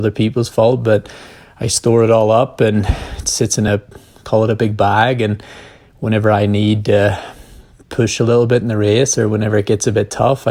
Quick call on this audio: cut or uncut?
uncut